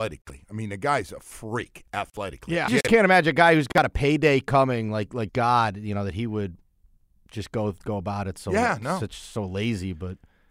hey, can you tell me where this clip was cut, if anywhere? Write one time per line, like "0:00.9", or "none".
0:02.7
0:05.3